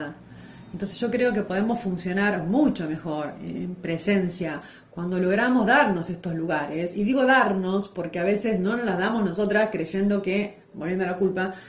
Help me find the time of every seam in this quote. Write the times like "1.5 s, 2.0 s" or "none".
10.6 s